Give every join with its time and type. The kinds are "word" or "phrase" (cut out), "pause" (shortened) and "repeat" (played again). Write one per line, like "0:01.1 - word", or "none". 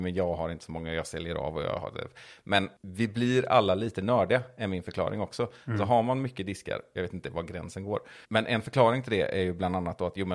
0:06.9 - phrase
0:08.2 - pause